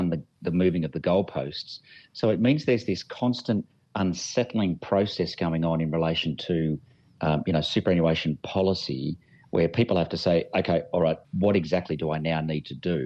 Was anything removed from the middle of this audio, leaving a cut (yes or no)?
no